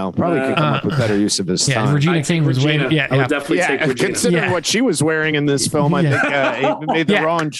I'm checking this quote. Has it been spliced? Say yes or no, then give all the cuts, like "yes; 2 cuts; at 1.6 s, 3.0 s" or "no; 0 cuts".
no; 0 cuts